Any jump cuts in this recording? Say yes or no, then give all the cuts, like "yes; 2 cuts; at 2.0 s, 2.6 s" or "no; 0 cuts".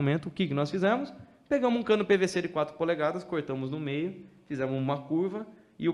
no; 0 cuts